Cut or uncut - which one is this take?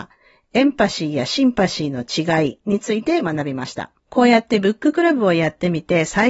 cut